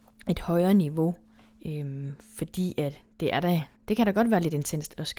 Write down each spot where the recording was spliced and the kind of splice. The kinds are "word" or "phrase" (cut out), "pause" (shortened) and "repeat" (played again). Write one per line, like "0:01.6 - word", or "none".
0:01.4 - pause
0:03.8 - pause